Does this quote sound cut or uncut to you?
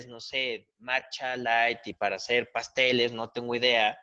uncut